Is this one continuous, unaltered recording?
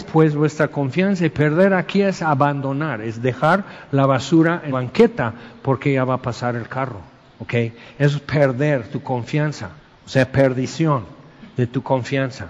no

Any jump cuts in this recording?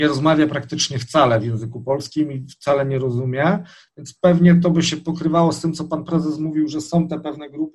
no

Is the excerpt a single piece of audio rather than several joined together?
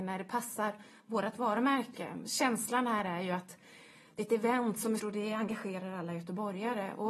no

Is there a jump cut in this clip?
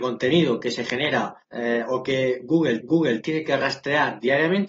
yes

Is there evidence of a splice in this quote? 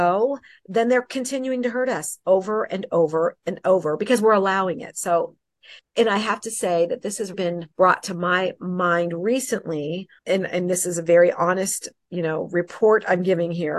yes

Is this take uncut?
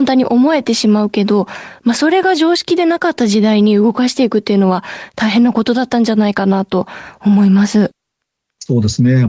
yes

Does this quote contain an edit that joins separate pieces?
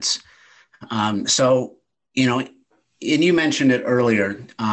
no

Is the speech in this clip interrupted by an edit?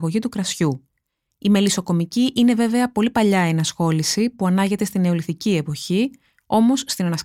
no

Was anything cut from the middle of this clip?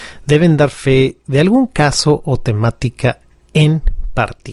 no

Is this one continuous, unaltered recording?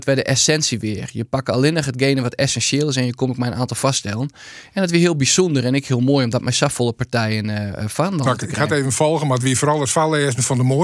yes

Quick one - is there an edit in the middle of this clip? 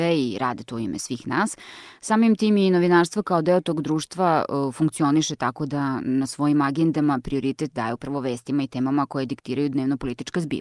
no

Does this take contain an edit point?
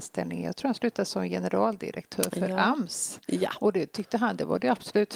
no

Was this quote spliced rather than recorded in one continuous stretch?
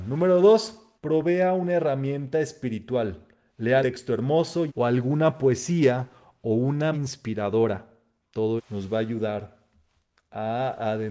yes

